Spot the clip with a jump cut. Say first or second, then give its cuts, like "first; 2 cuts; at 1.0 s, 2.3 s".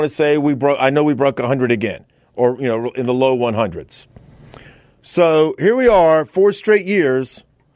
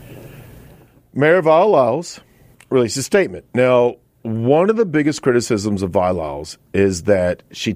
second; 2 cuts; at 2.5 s, 3.5 s